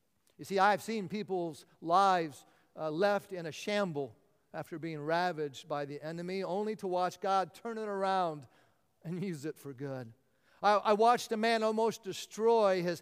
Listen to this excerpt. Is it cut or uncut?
uncut